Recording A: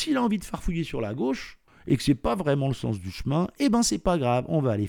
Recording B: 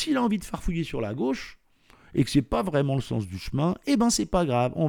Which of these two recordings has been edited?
A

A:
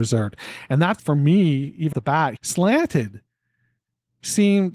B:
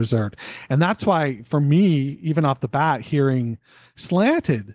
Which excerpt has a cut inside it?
A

